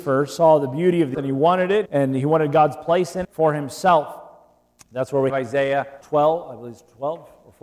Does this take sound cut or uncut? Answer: cut